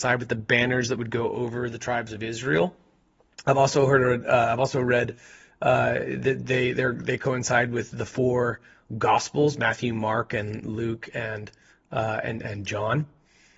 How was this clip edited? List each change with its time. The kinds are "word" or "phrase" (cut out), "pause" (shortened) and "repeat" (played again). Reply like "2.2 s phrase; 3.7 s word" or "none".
none